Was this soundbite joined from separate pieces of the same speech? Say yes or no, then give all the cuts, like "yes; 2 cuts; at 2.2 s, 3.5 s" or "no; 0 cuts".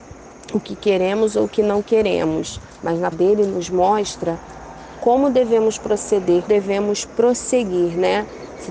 yes; 2 cuts; at 3.1 s, 6.5 s